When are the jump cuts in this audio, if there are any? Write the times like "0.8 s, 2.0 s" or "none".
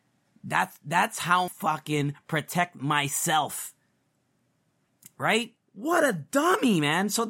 1.5 s, 5.6 s